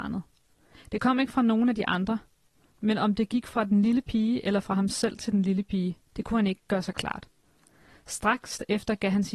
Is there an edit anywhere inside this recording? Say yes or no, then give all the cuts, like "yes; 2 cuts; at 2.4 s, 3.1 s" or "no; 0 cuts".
no; 0 cuts